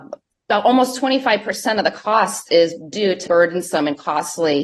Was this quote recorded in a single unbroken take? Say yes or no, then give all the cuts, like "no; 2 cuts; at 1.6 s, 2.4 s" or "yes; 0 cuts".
no; 1 cut; at 3.3 s